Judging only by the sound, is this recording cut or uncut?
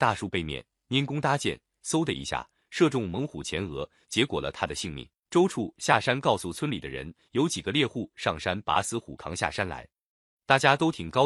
cut